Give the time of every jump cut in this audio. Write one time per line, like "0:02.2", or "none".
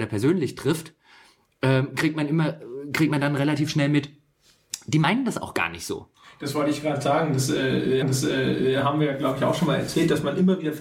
0:08.0